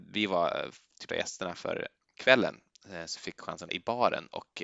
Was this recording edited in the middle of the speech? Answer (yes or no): yes